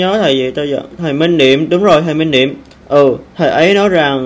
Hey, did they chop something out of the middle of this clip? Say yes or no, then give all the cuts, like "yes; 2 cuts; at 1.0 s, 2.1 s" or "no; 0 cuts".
yes; 1 cut; at 3.3 s